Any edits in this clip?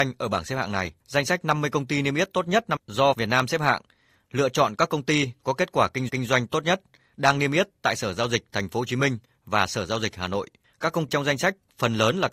yes; 6 cuts; at 1.0 s, 2.8 s, 3.1 s, 6.1 s, 10.6 s, 11.1 s

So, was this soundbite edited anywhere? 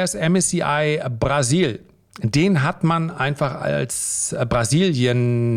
no; 0 cuts

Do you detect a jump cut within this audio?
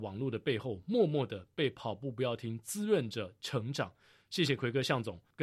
no; 0 cuts

